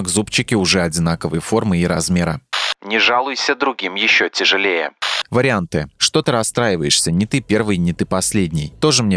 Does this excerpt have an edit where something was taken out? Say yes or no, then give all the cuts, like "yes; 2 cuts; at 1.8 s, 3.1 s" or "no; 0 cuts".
no; 0 cuts